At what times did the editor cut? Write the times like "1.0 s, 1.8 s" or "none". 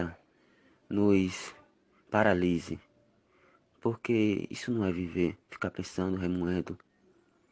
5.4 s